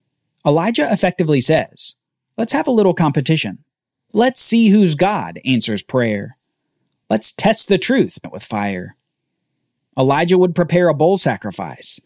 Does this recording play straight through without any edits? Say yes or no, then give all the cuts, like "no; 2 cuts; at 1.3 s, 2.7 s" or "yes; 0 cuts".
no; 1 cut; at 8.2 s